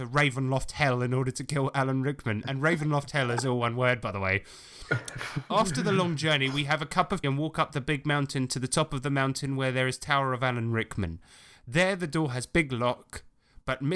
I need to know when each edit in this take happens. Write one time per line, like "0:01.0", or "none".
0:07.2